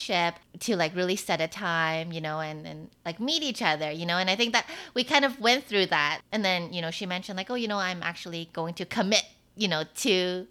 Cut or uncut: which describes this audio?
uncut